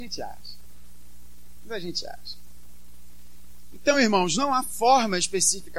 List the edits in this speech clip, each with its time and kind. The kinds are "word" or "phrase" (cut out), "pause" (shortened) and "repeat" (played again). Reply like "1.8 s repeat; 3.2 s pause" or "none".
none